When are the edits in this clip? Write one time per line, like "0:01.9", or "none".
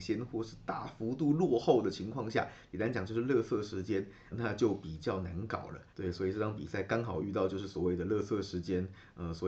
0:04.3
0:05.9